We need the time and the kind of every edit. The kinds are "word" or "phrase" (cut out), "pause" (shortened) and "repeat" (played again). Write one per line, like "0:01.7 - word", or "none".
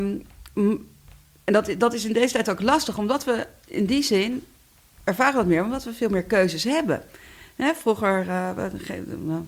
none